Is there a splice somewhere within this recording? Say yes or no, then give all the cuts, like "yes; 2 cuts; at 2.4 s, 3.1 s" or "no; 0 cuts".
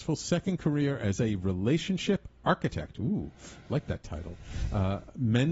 no; 0 cuts